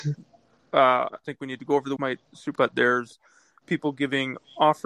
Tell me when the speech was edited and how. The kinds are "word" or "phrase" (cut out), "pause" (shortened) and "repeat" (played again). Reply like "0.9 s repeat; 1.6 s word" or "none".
1.2 s word; 2.0 s word; 2.5 s word